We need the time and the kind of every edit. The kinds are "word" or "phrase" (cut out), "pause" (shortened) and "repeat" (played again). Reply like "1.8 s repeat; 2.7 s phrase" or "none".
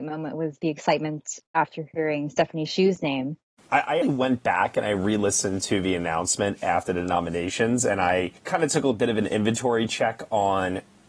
4.0 s word; 8.4 s pause